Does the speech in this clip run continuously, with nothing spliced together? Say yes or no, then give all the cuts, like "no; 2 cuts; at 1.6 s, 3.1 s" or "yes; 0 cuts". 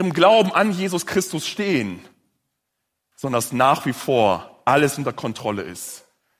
yes; 0 cuts